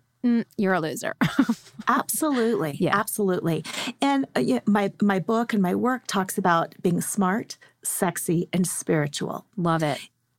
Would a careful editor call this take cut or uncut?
uncut